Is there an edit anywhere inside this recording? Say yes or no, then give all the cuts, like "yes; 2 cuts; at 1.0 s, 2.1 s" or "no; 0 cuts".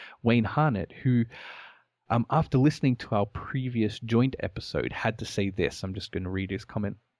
no; 0 cuts